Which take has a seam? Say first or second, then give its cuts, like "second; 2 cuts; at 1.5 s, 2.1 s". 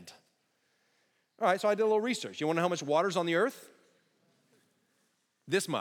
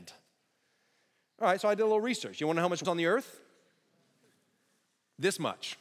second; 1 cut; at 2.8 s